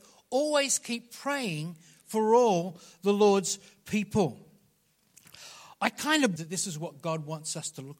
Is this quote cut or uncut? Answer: cut